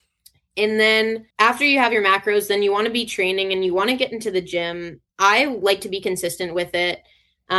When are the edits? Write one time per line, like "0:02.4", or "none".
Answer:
0:01.3
0:05.1